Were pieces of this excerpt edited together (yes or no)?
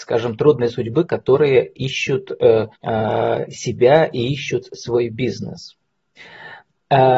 yes